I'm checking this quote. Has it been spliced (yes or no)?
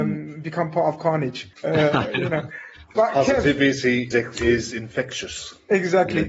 yes